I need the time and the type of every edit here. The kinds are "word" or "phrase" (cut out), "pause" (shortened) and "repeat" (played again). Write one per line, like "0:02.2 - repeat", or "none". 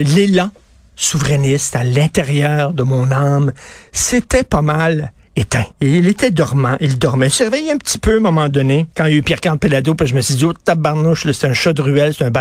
0:05.7 - pause
0:08.9 - pause

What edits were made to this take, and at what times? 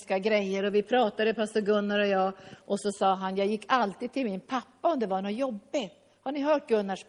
none

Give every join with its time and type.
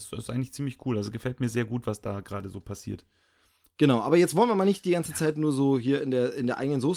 none

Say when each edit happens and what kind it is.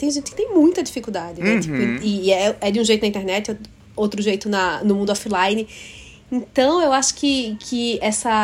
none

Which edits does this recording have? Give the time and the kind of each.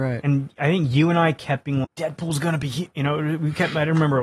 0:01.8 - word

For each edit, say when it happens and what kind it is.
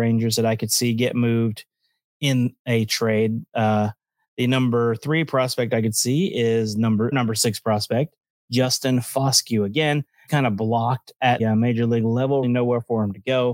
0:07.1 - word
0:10.3 - word
0:11.4 - word
0:12.4 - word

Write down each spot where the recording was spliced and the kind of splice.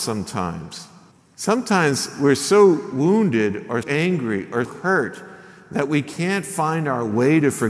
0:01.1 - pause
0:03.8 - word
0:04.6 - word

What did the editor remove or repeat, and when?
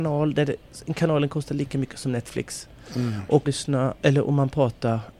0:03.5 - word

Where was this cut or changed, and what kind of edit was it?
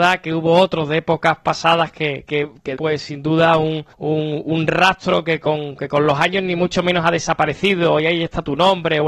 0:02.3 - word
0:02.8 - word
0:03.9 - pause

